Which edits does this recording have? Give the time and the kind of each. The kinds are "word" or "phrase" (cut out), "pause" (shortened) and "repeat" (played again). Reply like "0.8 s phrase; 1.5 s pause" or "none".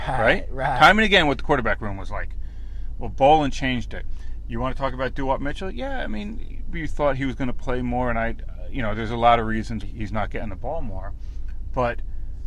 6.7 s word; 9.8 s word